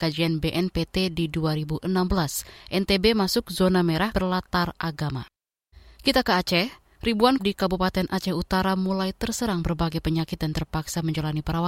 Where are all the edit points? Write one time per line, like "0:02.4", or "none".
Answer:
0:04.1
0:07.4